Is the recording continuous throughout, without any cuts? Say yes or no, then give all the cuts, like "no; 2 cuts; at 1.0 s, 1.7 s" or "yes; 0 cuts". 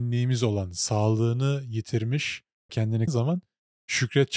no; 2 cuts; at 2.7 s, 3.1 s